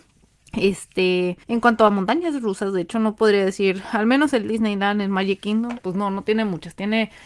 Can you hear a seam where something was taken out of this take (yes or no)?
yes